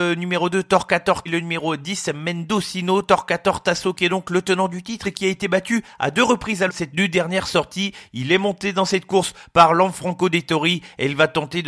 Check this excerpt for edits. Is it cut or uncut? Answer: cut